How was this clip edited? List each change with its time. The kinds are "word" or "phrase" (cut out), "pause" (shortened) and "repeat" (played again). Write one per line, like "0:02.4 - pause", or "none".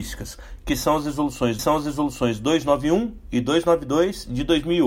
0:01.6 - repeat